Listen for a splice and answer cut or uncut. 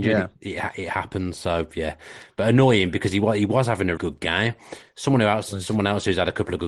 cut